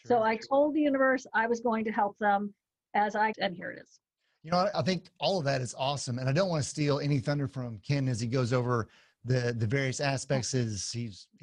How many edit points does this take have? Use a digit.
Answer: 2